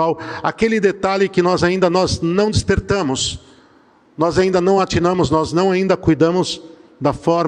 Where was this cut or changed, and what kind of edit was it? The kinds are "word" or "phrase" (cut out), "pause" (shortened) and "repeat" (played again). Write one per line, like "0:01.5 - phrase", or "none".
none